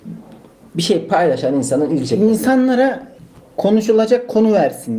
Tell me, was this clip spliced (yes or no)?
no